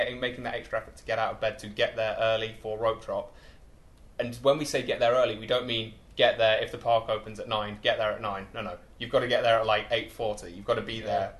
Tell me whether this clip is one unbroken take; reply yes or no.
yes